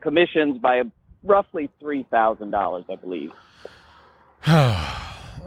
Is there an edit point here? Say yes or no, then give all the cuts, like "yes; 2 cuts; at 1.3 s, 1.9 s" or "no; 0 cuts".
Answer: no; 0 cuts